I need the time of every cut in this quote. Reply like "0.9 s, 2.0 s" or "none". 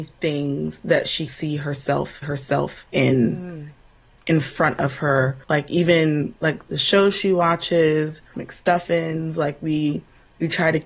1.3 s, 2.2 s, 5.4 s, 8.3 s